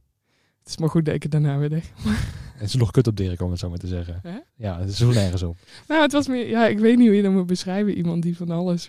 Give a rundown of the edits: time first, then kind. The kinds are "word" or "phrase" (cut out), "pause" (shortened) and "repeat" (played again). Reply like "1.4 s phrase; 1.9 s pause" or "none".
4.5 s pause